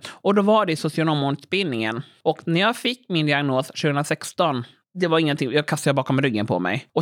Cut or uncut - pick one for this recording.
uncut